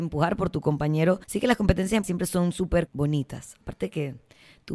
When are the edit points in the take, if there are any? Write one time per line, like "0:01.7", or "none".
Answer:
0:01.2
0:02.0
0:02.9

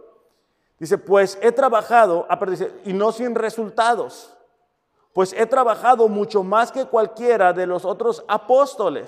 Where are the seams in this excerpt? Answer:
none

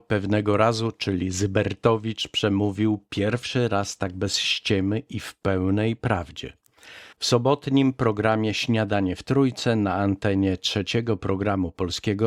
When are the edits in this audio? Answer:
0:07.1

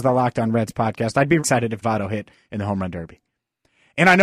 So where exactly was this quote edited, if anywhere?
0:01.4
0:01.8

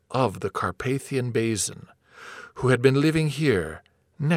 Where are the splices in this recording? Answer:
none

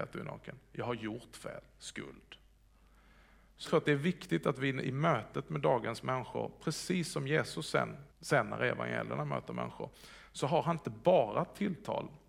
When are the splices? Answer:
0:03.6
0:08.1

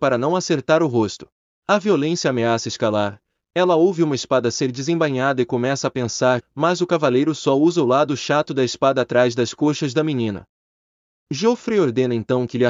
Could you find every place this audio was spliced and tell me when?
0:06.4

